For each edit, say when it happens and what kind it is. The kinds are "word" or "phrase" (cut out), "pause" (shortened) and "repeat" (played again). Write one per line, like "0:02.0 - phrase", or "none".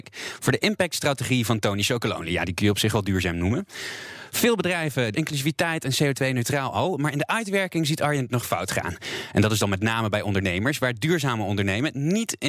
0:05.1 - phrase